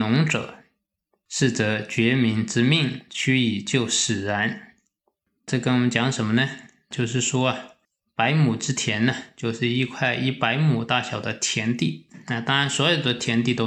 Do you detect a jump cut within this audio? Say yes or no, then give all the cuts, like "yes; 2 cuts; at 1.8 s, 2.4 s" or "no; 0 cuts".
no; 0 cuts